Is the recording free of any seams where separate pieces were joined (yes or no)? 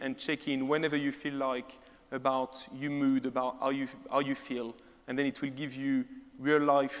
yes